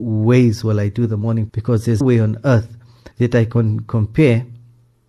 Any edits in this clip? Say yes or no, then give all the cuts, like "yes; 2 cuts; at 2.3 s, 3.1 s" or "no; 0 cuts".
yes; 3 cuts; at 1.5 s, 2.0 s, 3.1 s